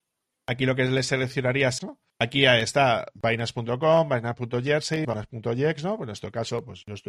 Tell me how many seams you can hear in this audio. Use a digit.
3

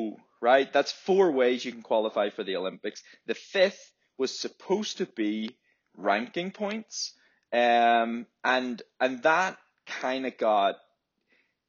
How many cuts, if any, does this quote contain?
0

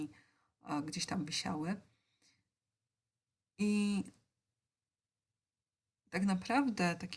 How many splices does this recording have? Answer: 0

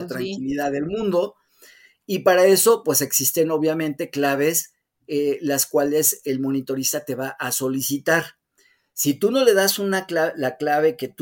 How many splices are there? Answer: 0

